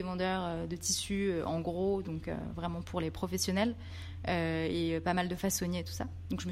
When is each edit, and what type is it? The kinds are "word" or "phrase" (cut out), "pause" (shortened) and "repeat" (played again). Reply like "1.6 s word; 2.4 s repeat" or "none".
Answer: none